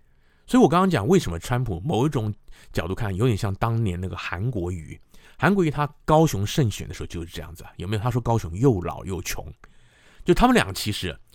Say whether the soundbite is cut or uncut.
cut